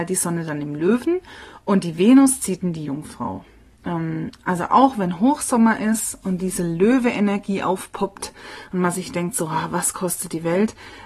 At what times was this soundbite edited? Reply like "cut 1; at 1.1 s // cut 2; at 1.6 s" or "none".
none

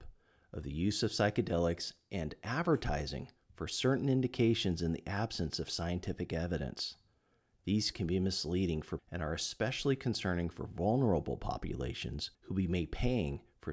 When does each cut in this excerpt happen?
cut 1; at 7.9 s // cut 2; at 9.0 s // cut 3; at 12.3 s

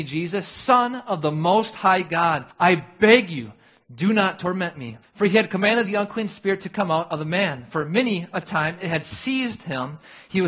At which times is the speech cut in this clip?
cut 1; at 2.5 s // cut 2; at 5.0 s

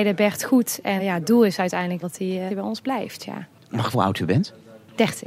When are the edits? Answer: cut 1; at 1.0 s // cut 2; at 2.0 s // cut 3; at 2.5 s // cut 4; at 3.9 s

